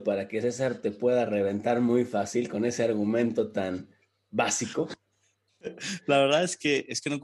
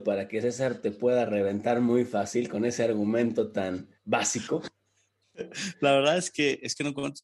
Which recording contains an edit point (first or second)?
second